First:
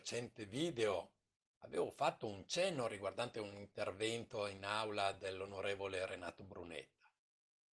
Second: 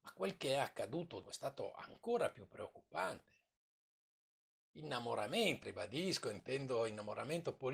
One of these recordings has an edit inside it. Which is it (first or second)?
second